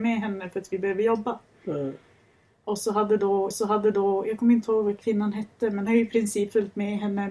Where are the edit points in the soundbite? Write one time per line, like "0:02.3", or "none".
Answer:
0:03.5
0:05.9

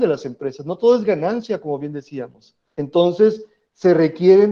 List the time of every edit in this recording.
0:02.6

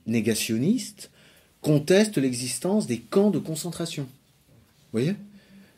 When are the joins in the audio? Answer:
none

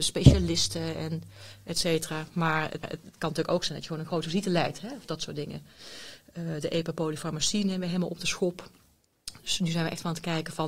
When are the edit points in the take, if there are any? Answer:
0:02.8

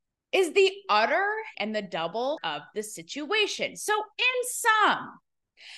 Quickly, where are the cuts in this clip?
0:01.5
0:02.4

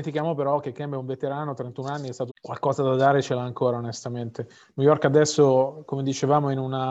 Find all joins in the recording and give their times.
0:02.3

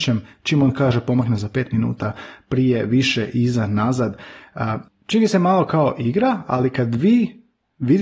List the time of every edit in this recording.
none

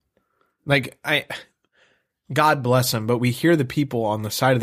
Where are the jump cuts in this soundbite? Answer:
none

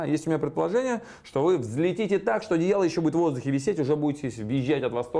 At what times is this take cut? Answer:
none

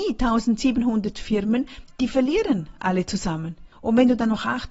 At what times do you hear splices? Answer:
0:03.7

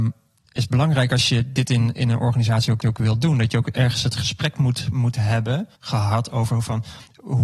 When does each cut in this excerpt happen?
0:02.8
0:05.8

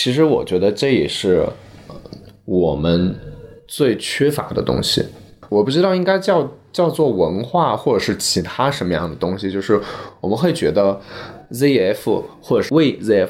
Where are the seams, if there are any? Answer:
none

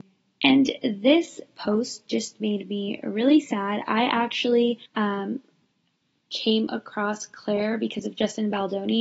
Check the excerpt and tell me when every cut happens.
0:04.8

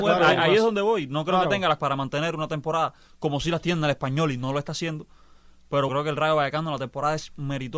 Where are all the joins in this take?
0:01.8
0:05.9

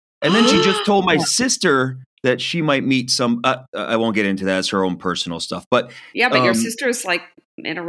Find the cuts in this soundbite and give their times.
0:02.1

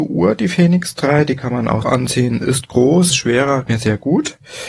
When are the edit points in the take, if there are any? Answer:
0:01.8
0:03.1
0:03.7

